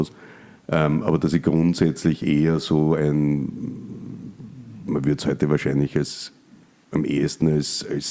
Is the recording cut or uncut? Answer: uncut